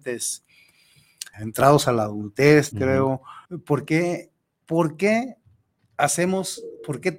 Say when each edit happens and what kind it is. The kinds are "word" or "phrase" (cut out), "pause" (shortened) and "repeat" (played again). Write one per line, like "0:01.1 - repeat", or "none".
0:01.3 - word
0:02.7 - word
0:03.4 - pause